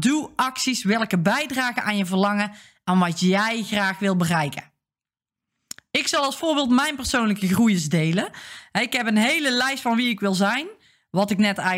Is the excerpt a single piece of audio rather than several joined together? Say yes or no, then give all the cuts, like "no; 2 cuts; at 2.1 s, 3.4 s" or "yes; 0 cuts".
yes; 0 cuts